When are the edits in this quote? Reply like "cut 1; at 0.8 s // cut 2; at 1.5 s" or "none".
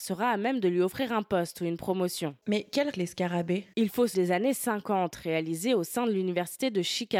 cut 1; at 2.9 s // cut 2; at 4.1 s